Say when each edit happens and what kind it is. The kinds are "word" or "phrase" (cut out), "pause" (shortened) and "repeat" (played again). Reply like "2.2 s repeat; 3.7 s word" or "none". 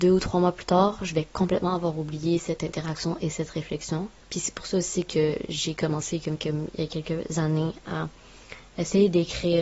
4.2 s pause